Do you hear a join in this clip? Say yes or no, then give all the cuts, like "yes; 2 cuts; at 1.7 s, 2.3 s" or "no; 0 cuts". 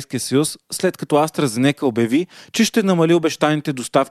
no; 0 cuts